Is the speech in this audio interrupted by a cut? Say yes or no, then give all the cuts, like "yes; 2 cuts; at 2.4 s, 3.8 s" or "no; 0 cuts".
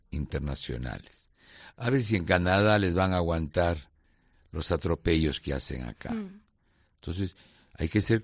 no; 0 cuts